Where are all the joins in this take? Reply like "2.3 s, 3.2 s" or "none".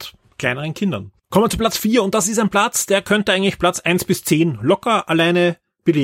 1.2 s